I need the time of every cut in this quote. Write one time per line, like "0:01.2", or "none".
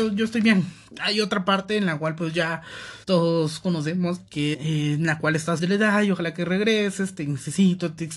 0:03.0
0:04.5
0:05.6